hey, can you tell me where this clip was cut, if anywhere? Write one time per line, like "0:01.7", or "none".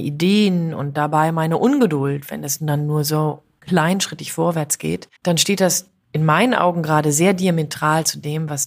0:05.2
0:06.0